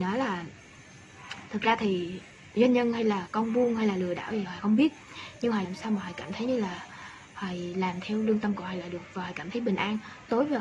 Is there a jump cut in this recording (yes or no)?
yes